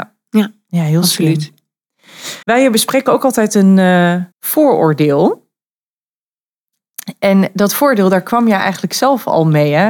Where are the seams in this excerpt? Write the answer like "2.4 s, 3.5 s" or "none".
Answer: 2.4 s, 4.3 s

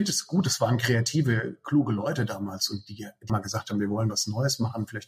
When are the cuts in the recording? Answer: 3.3 s

